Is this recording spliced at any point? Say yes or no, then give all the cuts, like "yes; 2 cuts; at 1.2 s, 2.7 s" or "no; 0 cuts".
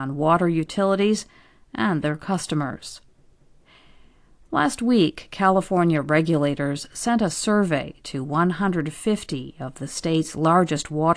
no; 0 cuts